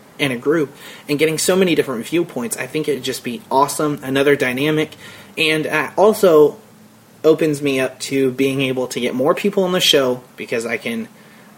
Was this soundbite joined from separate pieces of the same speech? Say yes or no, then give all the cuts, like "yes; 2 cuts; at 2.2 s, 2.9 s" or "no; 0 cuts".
no; 0 cuts